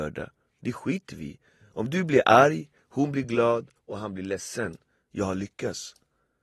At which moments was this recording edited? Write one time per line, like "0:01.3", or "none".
none